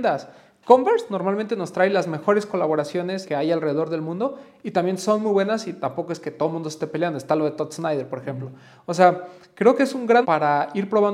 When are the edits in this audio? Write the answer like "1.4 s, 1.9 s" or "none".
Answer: 3.3 s, 10.2 s